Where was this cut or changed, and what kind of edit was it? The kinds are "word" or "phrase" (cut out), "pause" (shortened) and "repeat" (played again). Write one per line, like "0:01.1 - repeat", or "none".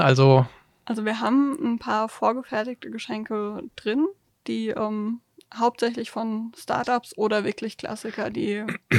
none